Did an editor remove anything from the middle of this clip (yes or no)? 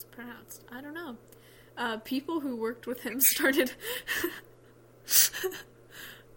no